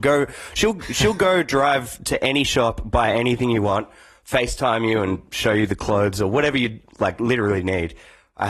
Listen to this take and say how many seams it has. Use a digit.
0